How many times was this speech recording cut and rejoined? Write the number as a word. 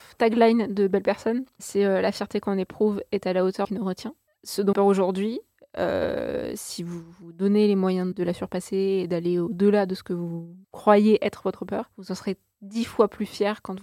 five